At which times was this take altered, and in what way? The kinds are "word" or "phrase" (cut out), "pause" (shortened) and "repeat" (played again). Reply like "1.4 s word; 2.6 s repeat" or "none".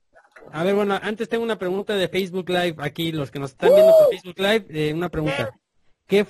none